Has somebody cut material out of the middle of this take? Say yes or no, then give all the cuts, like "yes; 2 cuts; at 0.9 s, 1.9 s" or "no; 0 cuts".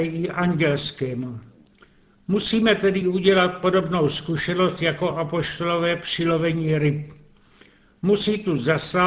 no; 0 cuts